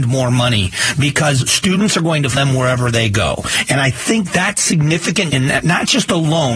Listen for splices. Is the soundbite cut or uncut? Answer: cut